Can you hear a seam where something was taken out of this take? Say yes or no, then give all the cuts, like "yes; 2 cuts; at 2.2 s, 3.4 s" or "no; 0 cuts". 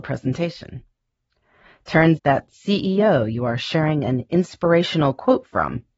yes; 1 cut; at 2.2 s